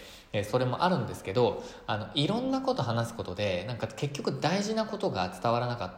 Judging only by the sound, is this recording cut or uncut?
uncut